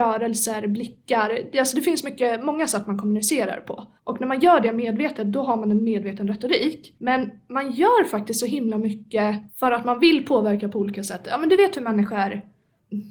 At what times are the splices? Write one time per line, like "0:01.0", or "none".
0:04.0
0:09.5